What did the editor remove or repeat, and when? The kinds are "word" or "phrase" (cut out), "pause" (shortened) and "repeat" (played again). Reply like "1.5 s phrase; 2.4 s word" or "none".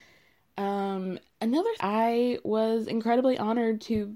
1.8 s word